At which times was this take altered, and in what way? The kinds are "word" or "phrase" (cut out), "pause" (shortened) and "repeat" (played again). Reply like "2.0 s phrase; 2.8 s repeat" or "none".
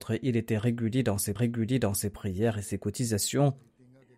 1.4 s repeat